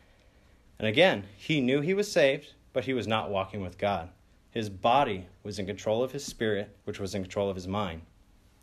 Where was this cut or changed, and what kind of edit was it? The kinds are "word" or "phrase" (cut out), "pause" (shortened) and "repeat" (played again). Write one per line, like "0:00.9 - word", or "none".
0:06.8 - pause